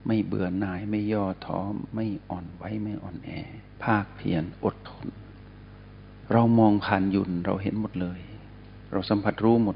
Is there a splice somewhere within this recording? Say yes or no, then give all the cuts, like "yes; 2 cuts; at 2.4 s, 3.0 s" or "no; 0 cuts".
yes; 1 cut; at 3.7 s